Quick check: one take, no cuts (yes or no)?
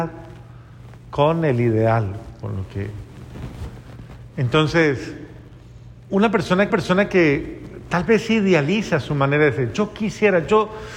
no